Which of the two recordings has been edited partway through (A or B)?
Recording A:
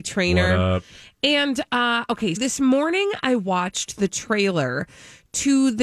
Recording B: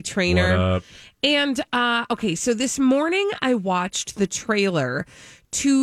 A